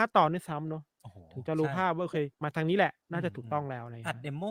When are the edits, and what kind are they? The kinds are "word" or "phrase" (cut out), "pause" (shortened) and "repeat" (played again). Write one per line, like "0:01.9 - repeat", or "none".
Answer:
0:02.3 - pause
0:03.0 - pause